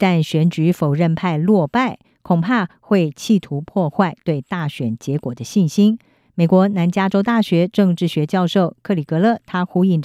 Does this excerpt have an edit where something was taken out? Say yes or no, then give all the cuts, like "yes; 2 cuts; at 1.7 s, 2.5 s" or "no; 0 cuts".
no; 0 cuts